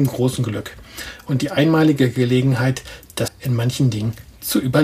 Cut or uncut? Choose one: cut